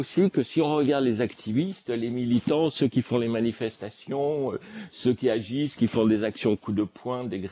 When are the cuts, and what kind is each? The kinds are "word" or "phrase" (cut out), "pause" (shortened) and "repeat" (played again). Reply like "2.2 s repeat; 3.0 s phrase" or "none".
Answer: none